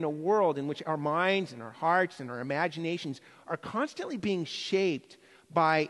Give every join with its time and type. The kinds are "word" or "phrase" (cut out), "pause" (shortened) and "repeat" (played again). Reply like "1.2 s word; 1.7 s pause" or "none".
none